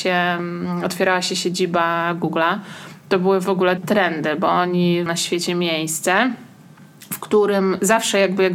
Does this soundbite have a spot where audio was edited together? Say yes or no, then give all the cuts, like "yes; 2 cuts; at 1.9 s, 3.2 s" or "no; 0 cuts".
yes; 2 cuts; at 3.8 s, 5.1 s